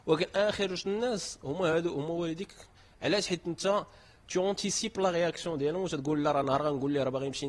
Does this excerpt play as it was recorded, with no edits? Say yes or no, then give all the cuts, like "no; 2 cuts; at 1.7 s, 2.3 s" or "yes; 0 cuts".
yes; 0 cuts